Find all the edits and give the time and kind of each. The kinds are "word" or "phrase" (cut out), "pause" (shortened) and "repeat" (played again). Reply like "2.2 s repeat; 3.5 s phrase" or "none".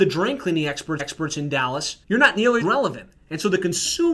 1.0 s repeat; 2.0 s pause; 2.6 s word